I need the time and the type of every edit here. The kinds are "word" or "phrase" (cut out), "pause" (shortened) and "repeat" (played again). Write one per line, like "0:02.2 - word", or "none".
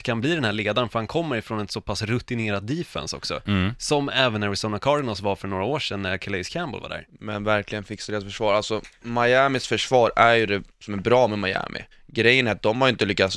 0:11.9 - pause